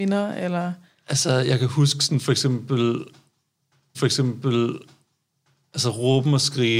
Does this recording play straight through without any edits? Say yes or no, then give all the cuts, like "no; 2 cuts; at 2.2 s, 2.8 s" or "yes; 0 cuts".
no; 1 cut; at 3.9 s